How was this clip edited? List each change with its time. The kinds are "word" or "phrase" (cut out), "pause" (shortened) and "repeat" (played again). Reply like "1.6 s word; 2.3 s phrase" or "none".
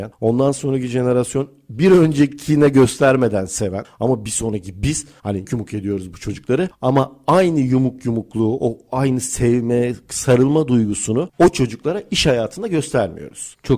5.4 s word